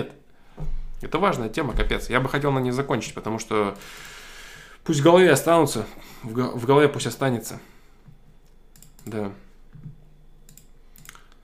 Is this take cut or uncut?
uncut